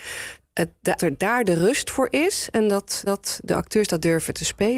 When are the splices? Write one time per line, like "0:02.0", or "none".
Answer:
0:01.0
0:03.1